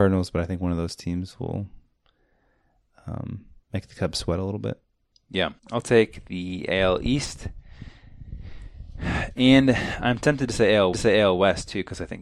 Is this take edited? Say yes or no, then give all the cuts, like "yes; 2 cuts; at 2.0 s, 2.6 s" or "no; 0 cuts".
yes; 3 cuts; at 3.6 s, 5.6 s, 10.9 s